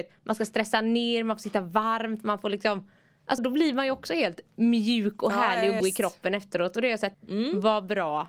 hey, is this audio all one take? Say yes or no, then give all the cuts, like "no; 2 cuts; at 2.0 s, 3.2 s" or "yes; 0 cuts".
no; 3 cuts; at 3.4 s, 5.8 s, 7.1 s